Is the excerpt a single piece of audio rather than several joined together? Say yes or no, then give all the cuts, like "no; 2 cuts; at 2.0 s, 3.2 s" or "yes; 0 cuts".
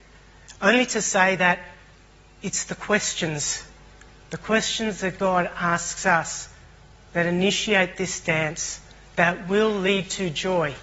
yes; 0 cuts